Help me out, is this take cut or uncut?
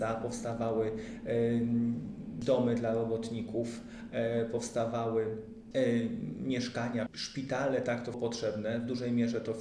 cut